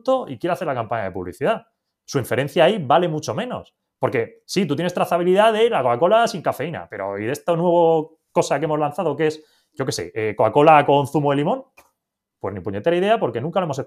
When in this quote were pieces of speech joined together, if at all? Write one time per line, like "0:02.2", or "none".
none